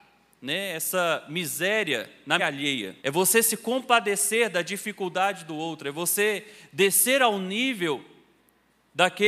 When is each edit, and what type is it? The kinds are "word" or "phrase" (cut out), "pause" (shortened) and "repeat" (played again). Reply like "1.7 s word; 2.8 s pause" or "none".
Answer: 2.4 s word; 3.0 s pause